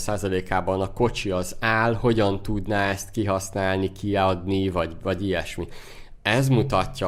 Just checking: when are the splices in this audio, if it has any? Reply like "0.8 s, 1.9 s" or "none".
none